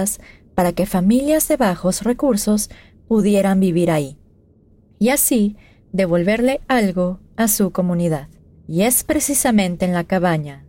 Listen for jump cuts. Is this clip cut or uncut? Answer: uncut